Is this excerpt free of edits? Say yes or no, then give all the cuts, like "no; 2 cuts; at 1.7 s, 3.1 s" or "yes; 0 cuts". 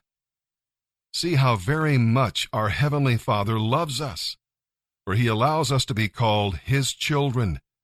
yes; 0 cuts